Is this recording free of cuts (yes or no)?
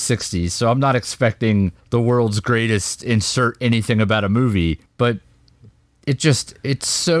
no